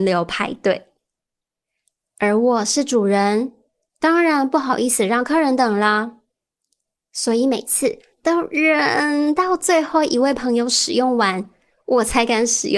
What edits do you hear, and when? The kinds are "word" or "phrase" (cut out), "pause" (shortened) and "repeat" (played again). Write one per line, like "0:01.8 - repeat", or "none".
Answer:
none

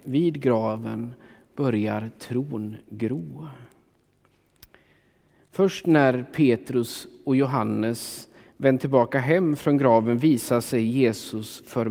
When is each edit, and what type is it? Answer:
none

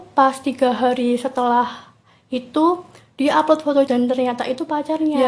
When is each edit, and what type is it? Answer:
0:03.9 - word

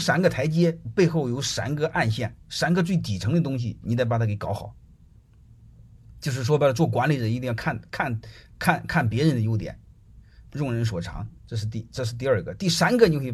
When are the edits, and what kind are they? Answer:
0:02.4 - pause
0:11.4 - pause

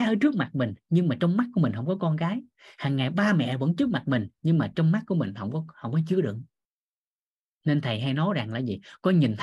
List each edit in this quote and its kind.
none

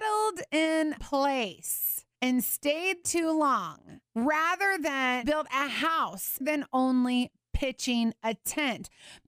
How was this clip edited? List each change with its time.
0:01.0 - word
0:02.1 - pause
0:03.0 - word
0:04.1 - pause
0:05.2 - word
0:06.4 - phrase

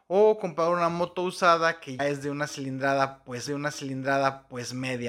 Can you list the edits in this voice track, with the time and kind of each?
0:02.0 - word
0:03.5 - repeat

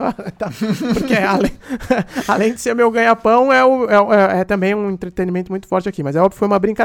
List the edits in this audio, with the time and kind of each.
none

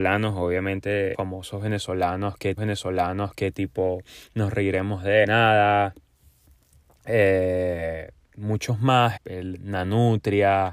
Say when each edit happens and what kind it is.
0:01.1 - word
0:02.6 - repeat
0:05.2 - phrase
0:09.2 - word

